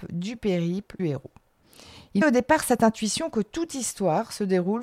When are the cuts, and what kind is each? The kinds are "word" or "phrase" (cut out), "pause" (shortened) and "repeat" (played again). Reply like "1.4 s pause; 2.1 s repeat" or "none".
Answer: 1.0 s word; 2.2 s word